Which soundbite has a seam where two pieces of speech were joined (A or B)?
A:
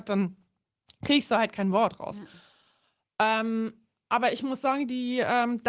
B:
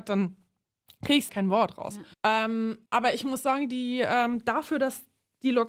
B